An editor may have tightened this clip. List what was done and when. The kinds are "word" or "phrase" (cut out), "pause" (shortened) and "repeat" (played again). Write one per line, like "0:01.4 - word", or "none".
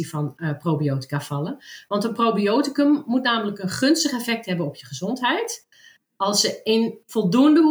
none